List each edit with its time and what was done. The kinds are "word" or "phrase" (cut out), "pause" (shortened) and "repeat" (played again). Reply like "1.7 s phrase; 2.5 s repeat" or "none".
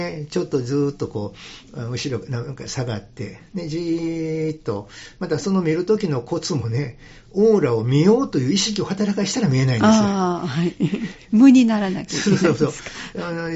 none